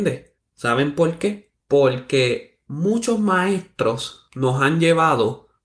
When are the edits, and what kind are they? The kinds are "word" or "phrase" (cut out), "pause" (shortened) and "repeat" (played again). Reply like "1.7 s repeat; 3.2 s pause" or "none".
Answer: 1.6 s pause